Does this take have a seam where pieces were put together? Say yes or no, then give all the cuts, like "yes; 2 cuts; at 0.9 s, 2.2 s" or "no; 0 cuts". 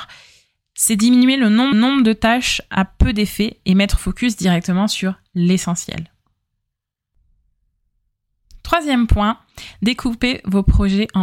yes; 2 cuts; at 1.7 s, 4.0 s